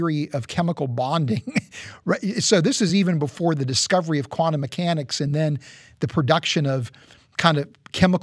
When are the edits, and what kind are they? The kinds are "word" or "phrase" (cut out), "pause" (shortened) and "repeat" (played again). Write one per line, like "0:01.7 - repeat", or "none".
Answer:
none